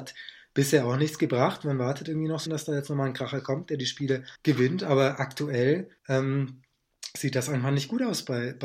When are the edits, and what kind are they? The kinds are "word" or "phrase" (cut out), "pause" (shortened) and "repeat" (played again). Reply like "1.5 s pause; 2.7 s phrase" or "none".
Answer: 2.5 s phrase; 4.3 s pause; 6.0 s pause